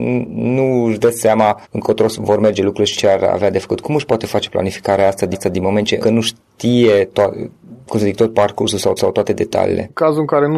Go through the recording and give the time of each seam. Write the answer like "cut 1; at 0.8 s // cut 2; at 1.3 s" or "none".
cut 1; at 1.6 s // cut 2; at 2.9 s // cut 3; at 5.3 s // cut 4; at 6.0 s // cut 5; at 9.0 s